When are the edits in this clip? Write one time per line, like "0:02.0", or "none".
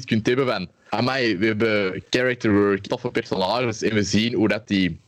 0:02.9